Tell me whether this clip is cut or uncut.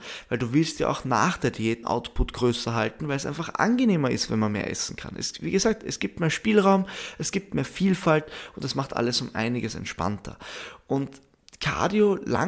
cut